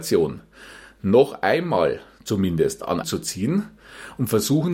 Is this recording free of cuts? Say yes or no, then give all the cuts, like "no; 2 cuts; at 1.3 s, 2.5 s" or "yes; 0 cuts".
no; 1 cut; at 3.0 s